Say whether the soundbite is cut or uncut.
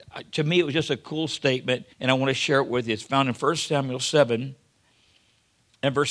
cut